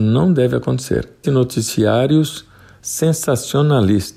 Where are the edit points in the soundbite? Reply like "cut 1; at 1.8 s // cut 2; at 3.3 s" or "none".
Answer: cut 1; at 1.2 s